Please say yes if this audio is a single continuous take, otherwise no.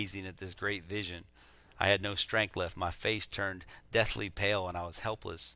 yes